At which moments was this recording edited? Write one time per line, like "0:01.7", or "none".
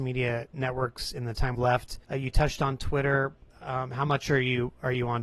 0:01.5
0:02.0

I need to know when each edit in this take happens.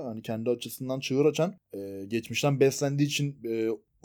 none

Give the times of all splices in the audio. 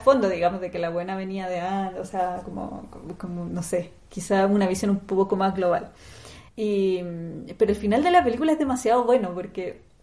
0:06.5

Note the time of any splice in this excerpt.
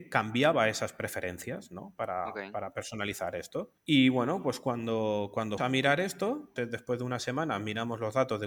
0:03.8
0:05.6
0:06.6

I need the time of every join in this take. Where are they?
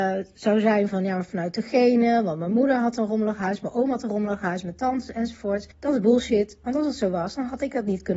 0:05.7

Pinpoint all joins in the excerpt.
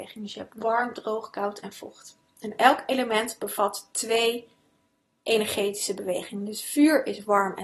none

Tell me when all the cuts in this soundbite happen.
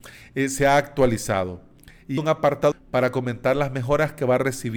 0:02.2
0:02.7

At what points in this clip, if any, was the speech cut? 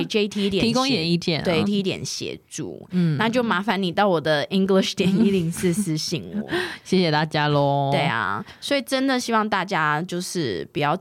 0:01.7
0:04.5

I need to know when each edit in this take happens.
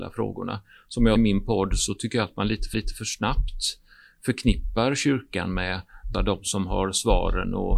0:01.2
0:02.7
0:06.1

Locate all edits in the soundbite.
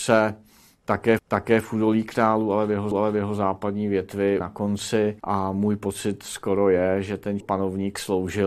0:01.2
0:02.9
0:04.4
0:05.2
0:07.4

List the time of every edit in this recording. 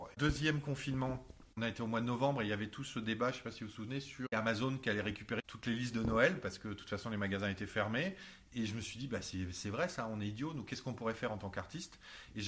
none

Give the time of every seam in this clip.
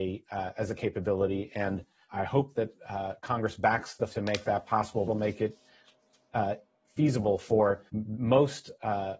0:02.1
0:04.1
0:05.1
0:07.9

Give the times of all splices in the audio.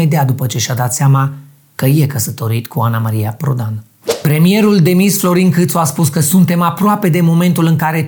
none

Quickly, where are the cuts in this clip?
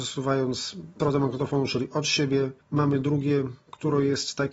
0:01.0
0:02.6

